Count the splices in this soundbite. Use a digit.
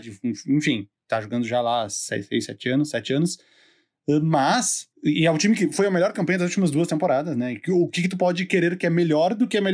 1